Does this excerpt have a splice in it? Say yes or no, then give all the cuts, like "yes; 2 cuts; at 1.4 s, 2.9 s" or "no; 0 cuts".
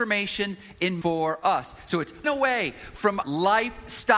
yes; 3 cuts; at 1.0 s, 2.2 s, 3.2 s